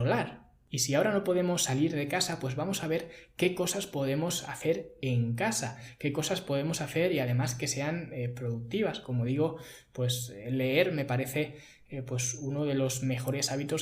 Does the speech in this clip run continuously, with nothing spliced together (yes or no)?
yes